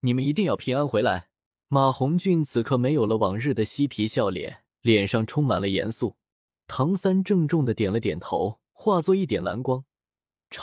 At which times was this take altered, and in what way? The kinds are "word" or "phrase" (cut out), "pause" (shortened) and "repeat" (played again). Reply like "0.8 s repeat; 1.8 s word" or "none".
1.5 s pause; 4.7 s pause; 6.4 s pause; 8.7 s pause